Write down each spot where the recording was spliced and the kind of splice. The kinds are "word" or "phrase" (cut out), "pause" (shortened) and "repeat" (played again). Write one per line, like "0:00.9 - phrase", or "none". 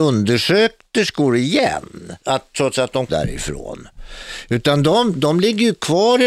0:02.2 - pause
0:03.1 - word

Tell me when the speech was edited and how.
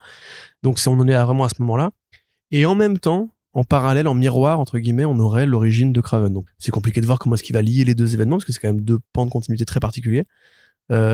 0:06.5 - word

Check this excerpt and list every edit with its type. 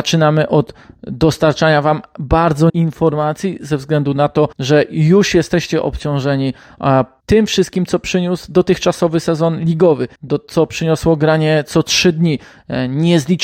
0:02.7 - word
0:04.5 - pause
0:07.2 - pause
0:10.1 - pause

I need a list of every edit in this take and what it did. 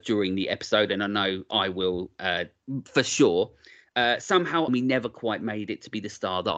0:04.7 - phrase

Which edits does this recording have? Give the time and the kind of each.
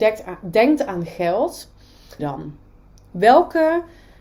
0:02.2 - phrase

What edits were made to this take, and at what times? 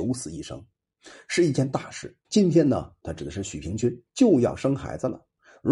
0:02.2 - pause
0:03.0 - phrase
0:04.1 - pause

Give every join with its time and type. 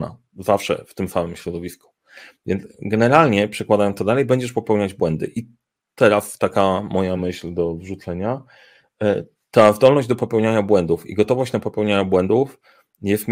none

